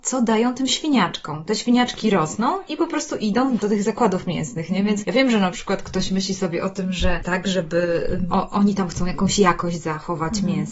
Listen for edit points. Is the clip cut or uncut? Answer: cut